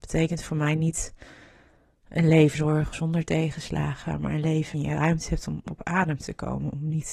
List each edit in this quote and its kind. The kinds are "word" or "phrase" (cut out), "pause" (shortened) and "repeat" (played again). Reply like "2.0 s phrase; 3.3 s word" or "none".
2.5 s word; 2.9 s word; 4.7 s word